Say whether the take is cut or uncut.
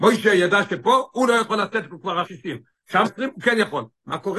cut